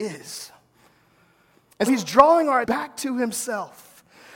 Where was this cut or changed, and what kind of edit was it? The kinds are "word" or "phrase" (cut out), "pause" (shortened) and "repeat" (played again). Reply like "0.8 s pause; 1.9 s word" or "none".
1.9 s word; 2.6 s word